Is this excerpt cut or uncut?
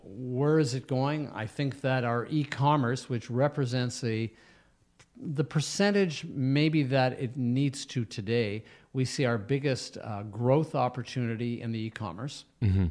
uncut